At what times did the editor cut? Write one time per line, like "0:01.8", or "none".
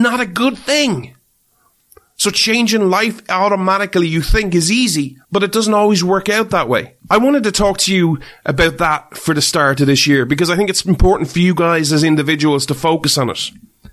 0:05.2
0:07.0